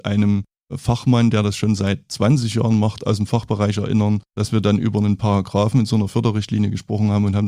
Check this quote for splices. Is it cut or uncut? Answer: cut